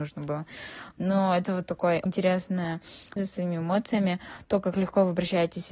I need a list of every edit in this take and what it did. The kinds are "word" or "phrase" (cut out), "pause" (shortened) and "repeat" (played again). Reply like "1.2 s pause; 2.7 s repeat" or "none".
2.1 s word; 3.2 s phrase

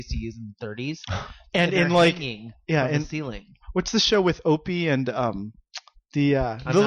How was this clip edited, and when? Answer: none

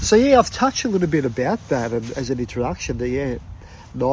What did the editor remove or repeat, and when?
2.1 s word

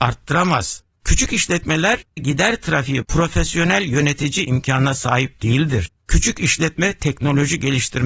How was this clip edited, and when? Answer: 2.2 s word; 3.0 s word; 4.5 s phrase

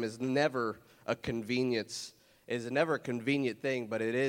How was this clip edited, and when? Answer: none

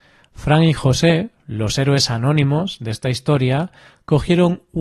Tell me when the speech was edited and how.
none

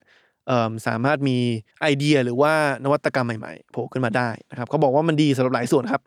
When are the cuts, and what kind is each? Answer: 1.7 s pause

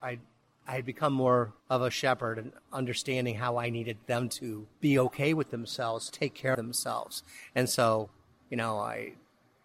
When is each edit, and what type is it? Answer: 1.6 s pause; 4.7 s pause; 6.1 s phrase; 6.5 s word

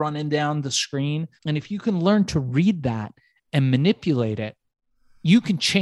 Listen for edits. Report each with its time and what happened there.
1.4 s pause

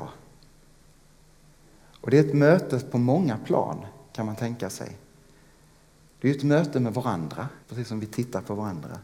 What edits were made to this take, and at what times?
7.6 s pause

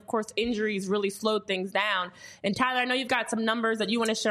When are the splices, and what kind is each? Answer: none

